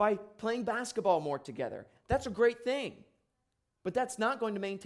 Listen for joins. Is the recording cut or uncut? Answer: uncut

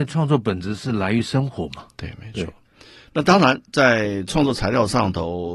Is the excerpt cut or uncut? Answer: uncut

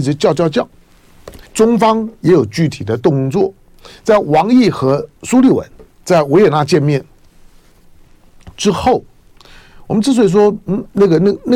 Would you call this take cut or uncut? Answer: cut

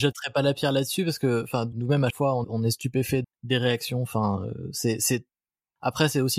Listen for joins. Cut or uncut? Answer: cut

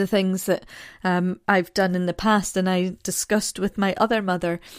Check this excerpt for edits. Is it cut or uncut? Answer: uncut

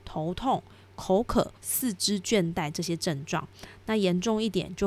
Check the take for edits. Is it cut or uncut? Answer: cut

